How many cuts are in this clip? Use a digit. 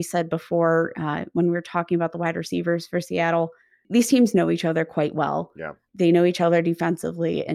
0